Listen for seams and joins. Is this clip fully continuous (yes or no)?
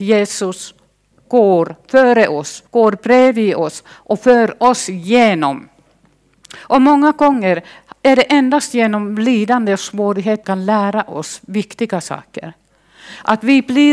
no